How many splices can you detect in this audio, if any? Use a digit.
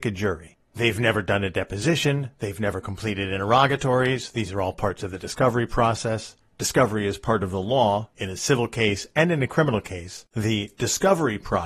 0